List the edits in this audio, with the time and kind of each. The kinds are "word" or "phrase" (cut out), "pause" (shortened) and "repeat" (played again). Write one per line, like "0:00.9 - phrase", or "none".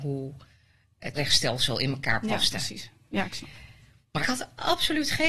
0:01.1 - word
0:04.2 - word

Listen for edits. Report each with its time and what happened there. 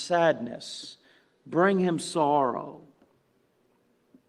none

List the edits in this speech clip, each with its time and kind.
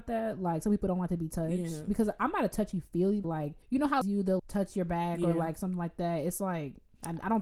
0:03.2 - phrase
0:03.6 - pause
0:04.0 - phrase
0:04.4 - word

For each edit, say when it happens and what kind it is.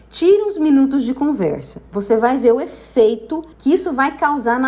0:03.5 - pause

